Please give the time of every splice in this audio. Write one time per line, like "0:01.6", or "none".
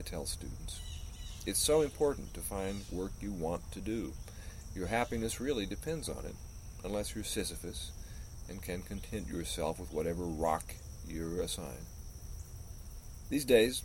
none